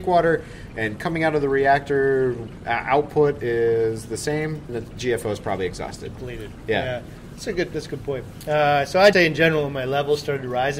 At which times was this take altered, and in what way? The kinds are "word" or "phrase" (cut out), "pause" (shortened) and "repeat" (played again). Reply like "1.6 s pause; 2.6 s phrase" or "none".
4.7 s word; 9.1 s word